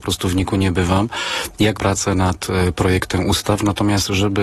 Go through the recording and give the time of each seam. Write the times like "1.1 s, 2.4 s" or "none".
1.8 s